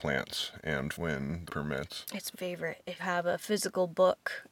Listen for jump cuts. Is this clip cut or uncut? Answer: cut